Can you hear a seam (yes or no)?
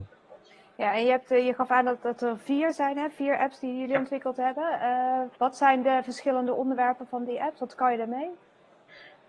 yes